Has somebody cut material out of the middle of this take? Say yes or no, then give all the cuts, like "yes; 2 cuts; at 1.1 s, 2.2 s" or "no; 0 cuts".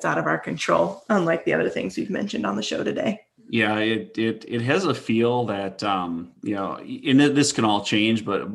yes; 1 cut; at 6.4 s